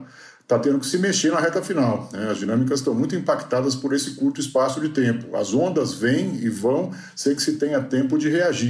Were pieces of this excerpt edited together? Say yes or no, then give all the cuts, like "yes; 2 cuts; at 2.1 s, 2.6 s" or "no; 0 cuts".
no; 0 cuts